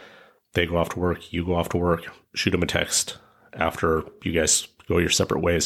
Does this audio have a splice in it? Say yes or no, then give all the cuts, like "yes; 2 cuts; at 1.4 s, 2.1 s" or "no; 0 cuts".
no; 0 cuts